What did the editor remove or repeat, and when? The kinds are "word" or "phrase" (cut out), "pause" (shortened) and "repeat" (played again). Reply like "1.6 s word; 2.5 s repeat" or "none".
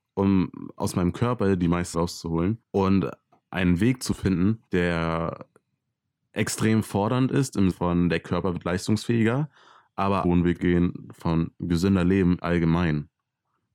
1.9 s word; 2.6 s pause; 4.7 s pause; 7.7 s word; 10.2 s phrase; 10.6 s word; 12.4 s word